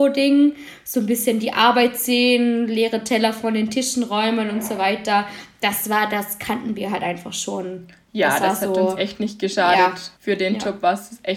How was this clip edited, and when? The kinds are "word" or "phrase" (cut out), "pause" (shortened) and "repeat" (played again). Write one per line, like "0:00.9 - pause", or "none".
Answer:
0:10.2 - pause